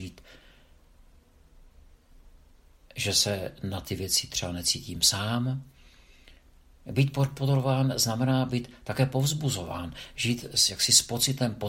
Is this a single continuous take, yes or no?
yes